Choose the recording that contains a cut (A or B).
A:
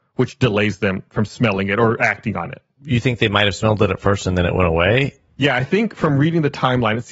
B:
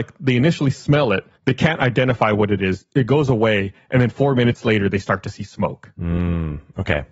B